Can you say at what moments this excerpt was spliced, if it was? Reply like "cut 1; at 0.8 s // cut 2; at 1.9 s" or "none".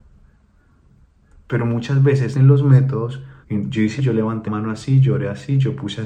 cut 1; at 2.3 s // cut 2; at 3.4 s // cut 3; at 4.0 s // cut 4; at 4.5 s